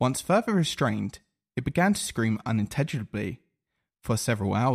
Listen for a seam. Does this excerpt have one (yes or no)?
no